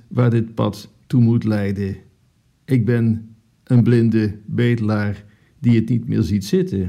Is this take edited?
no; 0 cuts

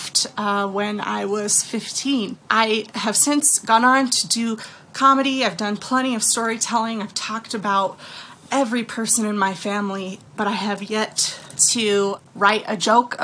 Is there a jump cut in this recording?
yes; 2 cuts; at 2.4 s, 10.3 s

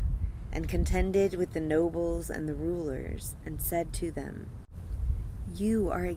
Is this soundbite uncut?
yes; 0 cuts

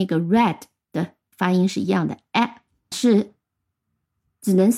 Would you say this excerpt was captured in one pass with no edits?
no; 2 cuts; at 1.3 s, 2.9 s

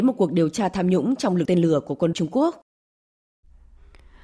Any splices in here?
yes; 2 cuts; at 1.5 s, 2.1 s

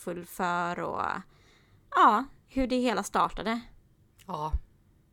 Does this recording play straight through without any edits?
yes; 0 cuts

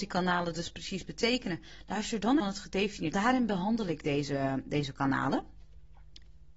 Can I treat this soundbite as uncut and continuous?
no; 2 cuts; at 2.4 s, 3.1 s

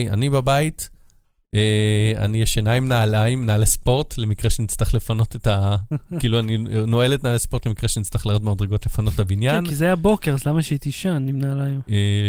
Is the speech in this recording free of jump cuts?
yes; 0 cuts

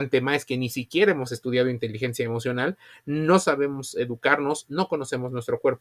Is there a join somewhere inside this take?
no; 0 cuts

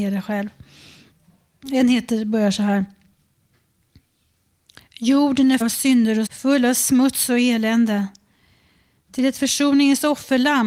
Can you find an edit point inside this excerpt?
yes; 2 cuts; at 5.6 s, 6.3 s

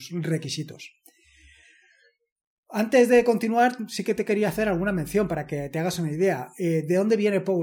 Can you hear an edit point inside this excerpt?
no; 0 cuts

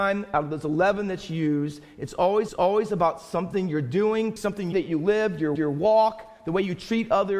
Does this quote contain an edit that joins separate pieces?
yes; 4 cuts; at 2.5 s, 4.4 s, 4.7 s, 5.6 s

